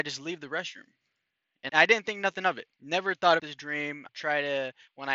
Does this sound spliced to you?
yes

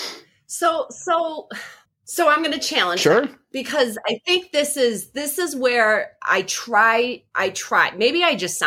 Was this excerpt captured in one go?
no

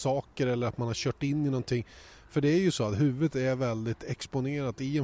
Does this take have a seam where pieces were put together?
no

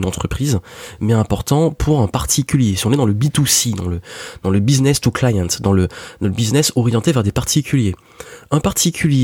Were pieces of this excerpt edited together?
no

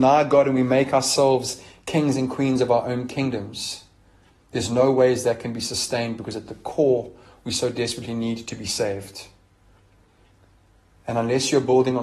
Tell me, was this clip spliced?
no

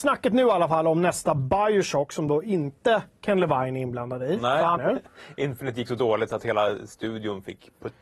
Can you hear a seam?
yes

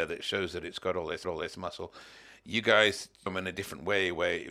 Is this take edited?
yes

